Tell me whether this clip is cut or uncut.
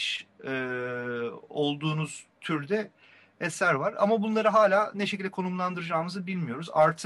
uncut